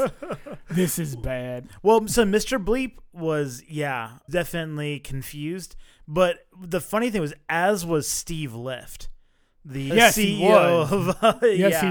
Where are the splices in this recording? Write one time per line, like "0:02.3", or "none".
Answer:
0:04.3
0:09.9